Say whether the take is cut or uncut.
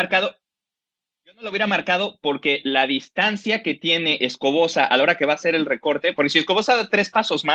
uncut